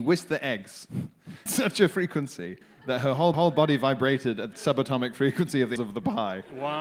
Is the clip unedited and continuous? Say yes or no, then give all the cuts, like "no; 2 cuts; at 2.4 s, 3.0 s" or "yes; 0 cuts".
no; 5 cuts; at 1.5 s, 2.6 s, 3.3 s, 4.5 s, 5.8 s